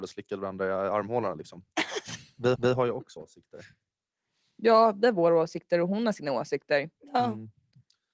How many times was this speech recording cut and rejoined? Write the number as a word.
two